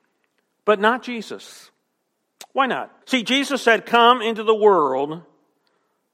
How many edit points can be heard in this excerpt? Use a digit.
1